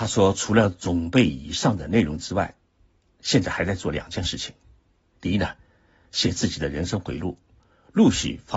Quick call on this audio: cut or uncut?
uncut